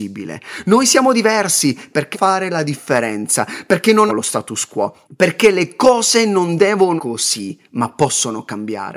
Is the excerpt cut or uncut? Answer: cut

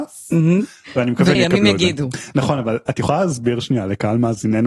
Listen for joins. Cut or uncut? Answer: cut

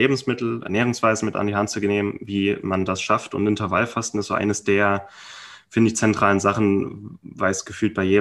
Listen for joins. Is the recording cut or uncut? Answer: uncut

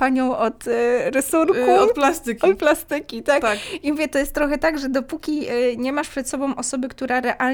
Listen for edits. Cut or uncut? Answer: uncut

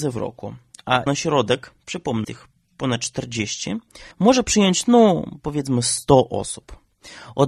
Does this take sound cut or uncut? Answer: cut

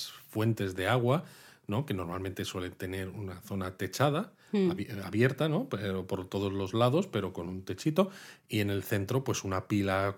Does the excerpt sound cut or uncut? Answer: uncut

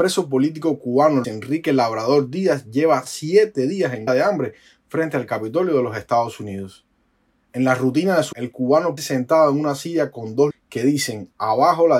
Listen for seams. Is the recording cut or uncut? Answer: cut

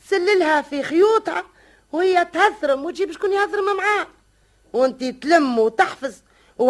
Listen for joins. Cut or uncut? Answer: uncut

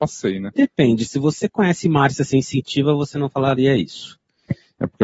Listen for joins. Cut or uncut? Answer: uncut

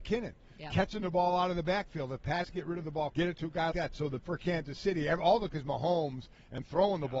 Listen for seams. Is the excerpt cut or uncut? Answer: cut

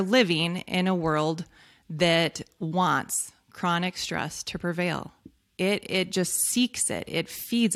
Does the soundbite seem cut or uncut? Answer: uncut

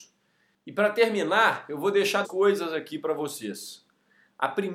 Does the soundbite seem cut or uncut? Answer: cut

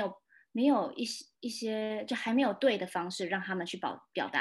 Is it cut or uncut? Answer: cut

